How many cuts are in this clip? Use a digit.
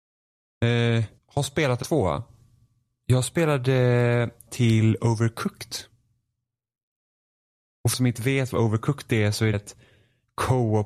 5